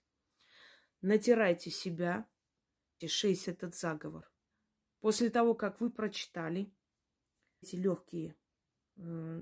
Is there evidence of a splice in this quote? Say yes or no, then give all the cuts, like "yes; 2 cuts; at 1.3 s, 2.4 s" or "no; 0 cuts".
yes; 4 cuts; at 3.0 s, 3.5 s, 4.5 s, 7.6 s